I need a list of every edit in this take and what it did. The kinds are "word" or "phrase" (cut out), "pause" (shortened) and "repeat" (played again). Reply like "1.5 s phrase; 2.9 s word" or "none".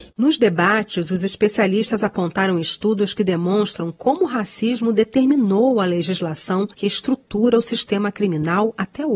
6.7 s pause